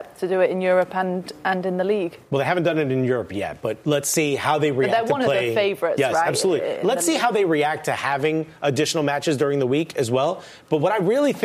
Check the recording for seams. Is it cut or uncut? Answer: uncut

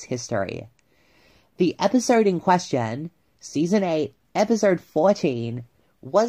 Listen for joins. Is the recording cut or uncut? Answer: uncut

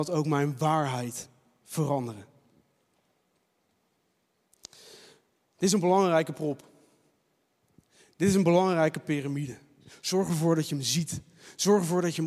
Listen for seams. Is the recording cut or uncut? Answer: uncut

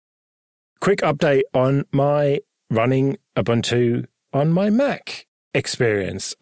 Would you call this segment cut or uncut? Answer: cut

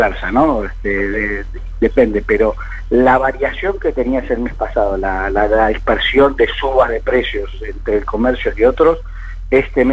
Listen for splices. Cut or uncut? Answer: uncut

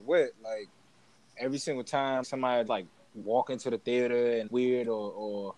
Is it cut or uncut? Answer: cut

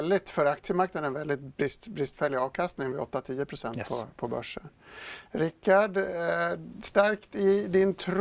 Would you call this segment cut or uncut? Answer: cut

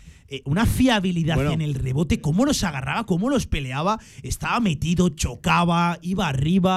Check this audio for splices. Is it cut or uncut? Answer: uncut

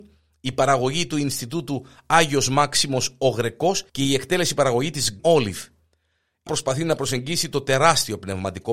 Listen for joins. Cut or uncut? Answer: cut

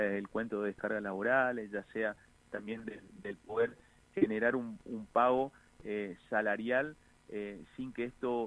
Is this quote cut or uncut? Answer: uncut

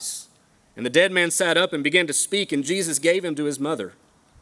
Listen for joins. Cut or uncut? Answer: uncut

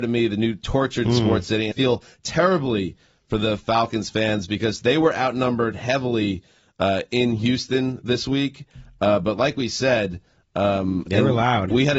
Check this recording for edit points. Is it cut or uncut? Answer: cut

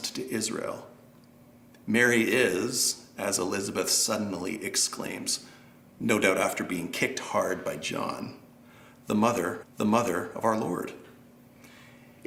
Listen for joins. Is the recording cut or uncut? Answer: cut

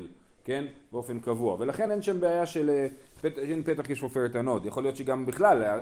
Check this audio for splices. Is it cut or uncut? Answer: uncut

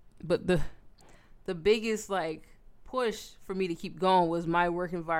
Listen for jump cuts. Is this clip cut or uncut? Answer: uncut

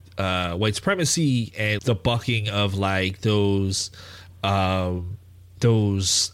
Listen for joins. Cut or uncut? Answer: cut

